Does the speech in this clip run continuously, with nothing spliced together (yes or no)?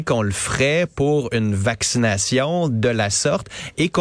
yes